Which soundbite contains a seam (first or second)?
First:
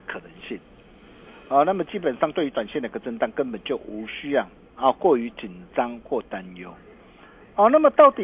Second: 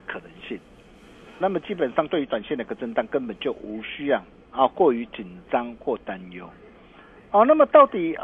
second